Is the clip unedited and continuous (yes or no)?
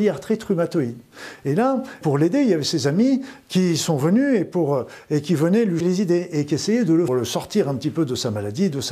no